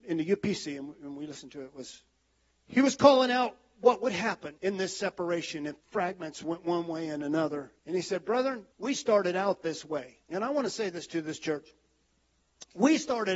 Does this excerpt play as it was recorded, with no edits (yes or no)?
no